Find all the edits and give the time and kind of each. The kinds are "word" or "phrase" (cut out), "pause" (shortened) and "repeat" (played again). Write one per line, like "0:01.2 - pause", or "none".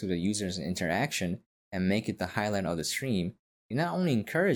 none